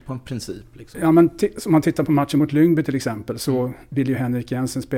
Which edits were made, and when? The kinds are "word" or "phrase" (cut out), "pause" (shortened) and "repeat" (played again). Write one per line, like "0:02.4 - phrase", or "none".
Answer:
none